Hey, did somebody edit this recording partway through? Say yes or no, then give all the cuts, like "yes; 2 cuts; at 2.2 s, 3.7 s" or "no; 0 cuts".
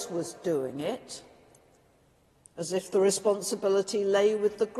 no; 0 cuts